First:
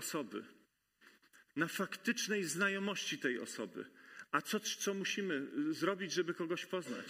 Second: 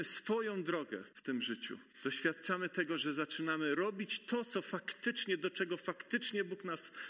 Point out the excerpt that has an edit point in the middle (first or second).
second